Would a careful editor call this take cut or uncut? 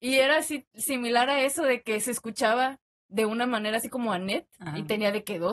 uncut